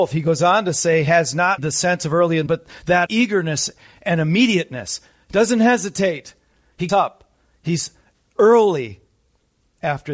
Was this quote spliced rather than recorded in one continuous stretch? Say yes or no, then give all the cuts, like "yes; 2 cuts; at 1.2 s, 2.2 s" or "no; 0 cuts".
yes; 4 cuts; at 1.6 s, 2.5 s, 3.1 s, 6.9 s